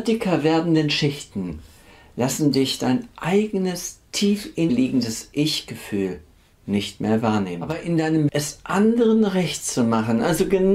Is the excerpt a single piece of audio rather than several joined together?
no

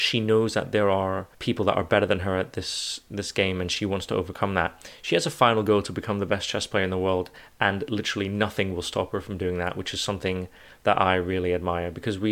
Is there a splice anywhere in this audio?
yes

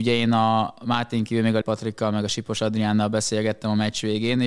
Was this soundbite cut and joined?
yes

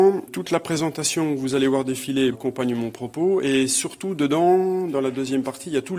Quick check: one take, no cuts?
no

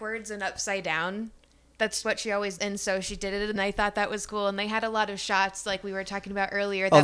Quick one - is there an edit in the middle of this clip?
yes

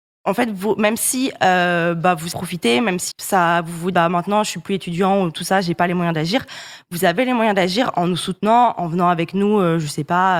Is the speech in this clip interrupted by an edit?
yes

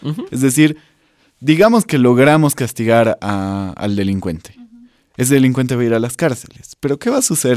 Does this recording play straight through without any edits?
yes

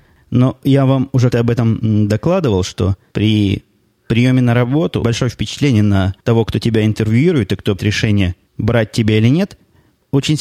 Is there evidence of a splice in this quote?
yes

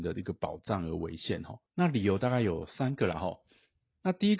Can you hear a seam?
yes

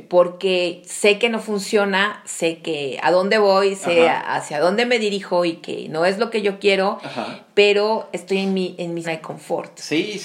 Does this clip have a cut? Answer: yes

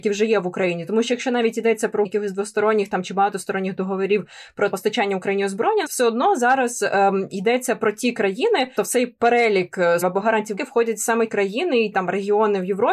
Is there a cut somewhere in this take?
yes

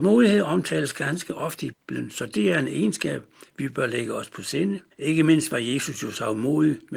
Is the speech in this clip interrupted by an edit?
yes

